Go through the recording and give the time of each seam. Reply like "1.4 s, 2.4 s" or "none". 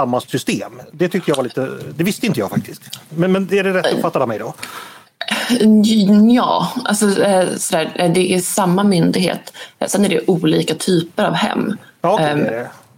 none